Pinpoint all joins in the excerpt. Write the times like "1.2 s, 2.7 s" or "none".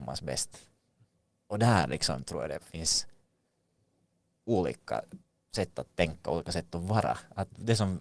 none